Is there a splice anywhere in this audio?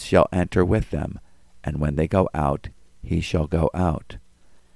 no; 0 cuts

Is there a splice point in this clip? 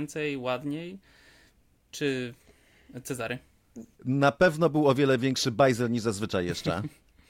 yes; 1 cut; at 3.9 s

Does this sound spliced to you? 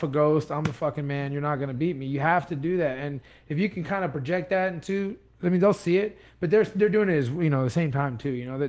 no; 0 cuts

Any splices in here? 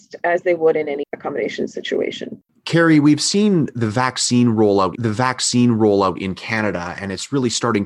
yes; 3 cuts; at 1.0 s, 2.5 s, 5.0 s

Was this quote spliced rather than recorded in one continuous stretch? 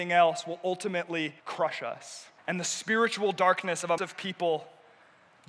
yes; 3 cuts; at 1.4 s, 2.4 s, 4.0 s

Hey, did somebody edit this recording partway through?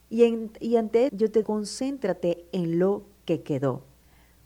yes; 2 cuts; at 1.1 s, 1.4 s

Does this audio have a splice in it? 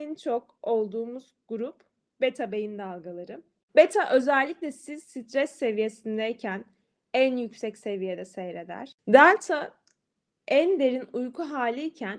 no; 0 cuts

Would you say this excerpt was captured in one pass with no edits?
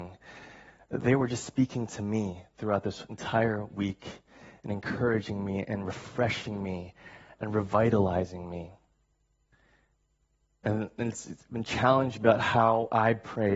yes; 0 cuts

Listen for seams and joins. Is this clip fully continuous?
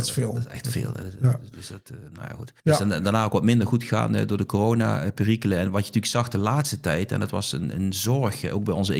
no; 1 cut; at 2.6 s

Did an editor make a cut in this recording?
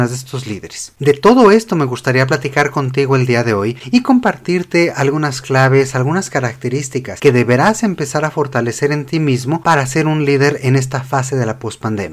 no; 0 cuts

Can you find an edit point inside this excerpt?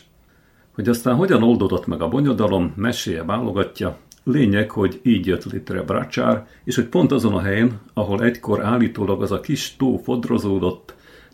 no; 0 cuts

